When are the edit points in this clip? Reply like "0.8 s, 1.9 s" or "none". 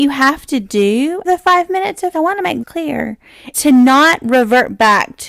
1.2 s, 2.1 s, 2.6 s, 3.5 s